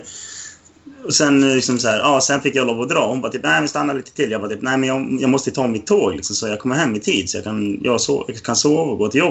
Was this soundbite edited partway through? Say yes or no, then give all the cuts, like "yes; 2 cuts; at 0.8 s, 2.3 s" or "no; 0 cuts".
no; 0 cuts